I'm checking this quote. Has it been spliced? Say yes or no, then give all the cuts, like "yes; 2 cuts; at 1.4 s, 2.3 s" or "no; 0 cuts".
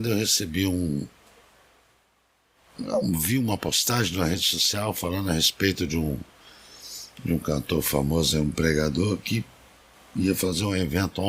no; 0 cuts